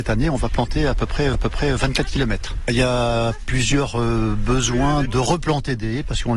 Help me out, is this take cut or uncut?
cut